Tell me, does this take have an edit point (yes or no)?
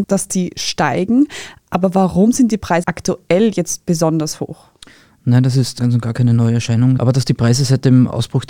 yes